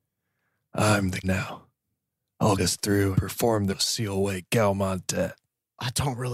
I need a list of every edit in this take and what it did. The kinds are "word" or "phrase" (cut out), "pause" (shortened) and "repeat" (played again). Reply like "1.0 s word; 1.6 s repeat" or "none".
1.2 s word; 2.6 s word; 3.1 s word; 3.7 s word

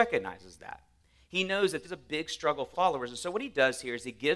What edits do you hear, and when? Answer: 1.8 s word; 2.7 s word

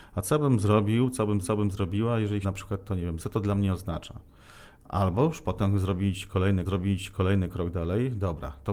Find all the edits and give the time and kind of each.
1.4 s repeat; 2.4 s word; 3.2 s word; 6.7 s repeat

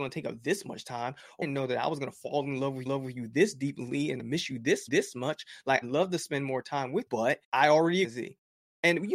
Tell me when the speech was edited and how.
1.4 s word; 2.9 s repeat; 4.2 s phrase; 4.9 s repeat; 5.8 s word; 7.1 s word; 7.4 s pause; 8.0 s phrase

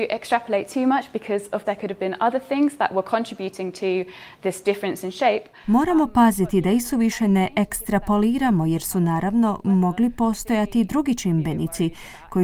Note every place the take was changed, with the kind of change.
1.6 s word

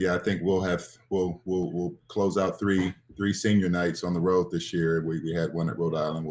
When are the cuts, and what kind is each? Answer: none

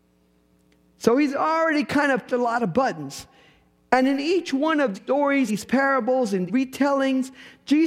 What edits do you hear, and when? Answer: 2.3 s word; 4.9 s word; 5.5 s word; 6.5 s word

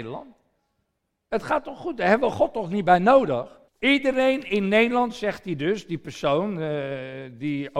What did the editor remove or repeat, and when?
3.7 s pause

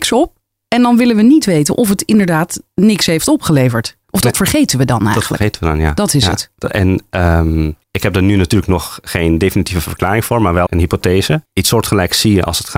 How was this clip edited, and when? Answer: 4.0 s pause; 7.8 s pause; 10.7 s word; 11.5 s pause

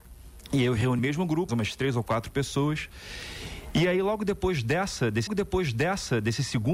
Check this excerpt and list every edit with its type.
1.0 s word; 1.5 s word; 5.3 s repeat

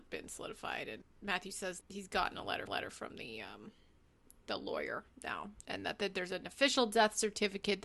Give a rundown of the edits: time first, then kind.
1.0 s word; 1.8 s word; 2.7 s repeat; 5.6 s pause

